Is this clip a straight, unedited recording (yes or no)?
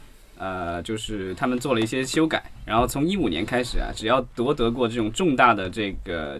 no